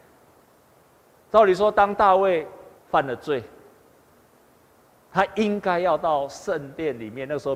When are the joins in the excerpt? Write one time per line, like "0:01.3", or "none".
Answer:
0:02.8